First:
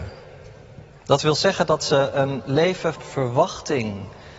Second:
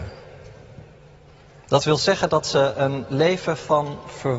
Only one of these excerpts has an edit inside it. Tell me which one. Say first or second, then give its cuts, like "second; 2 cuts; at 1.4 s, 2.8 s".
first; 2 cuts; at 0.9 s, 2.9 s